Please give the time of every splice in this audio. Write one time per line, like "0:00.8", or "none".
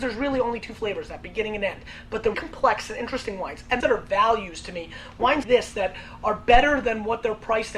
0:02.3
0:03.8
0:05.4